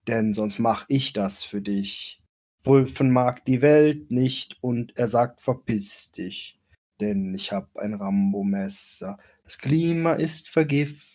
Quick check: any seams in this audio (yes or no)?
no